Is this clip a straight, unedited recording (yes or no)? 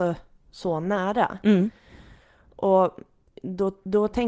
yes